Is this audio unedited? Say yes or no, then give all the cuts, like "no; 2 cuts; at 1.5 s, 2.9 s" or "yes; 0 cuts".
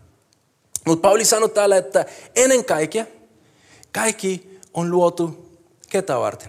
yes; 0 cuts